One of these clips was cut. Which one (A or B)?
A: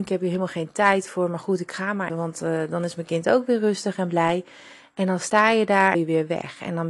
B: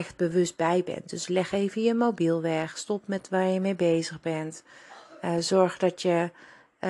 A